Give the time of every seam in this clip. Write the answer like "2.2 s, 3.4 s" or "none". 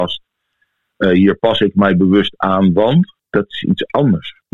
3.2 s